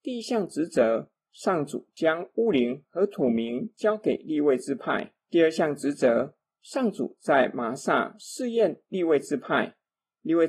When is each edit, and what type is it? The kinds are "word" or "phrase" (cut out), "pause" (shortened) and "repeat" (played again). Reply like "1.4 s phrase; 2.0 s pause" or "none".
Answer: 5.2 s pause